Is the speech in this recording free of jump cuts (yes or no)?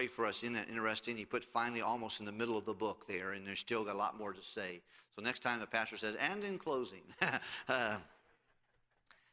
yes